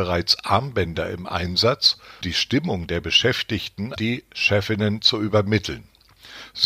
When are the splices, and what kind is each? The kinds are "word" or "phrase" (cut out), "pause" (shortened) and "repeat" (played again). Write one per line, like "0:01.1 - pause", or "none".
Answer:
0:02.2 - word
0:04.0 - word